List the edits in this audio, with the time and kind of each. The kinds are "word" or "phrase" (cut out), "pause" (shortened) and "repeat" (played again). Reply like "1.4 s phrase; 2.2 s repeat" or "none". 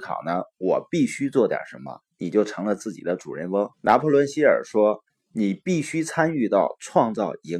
3.7 s pause; 5.1 s pause